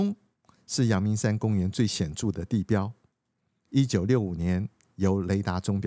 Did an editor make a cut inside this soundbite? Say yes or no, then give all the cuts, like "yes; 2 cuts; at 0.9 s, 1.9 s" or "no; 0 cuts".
no; 0 cuts